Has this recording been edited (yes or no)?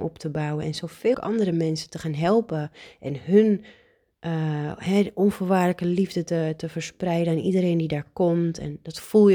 yes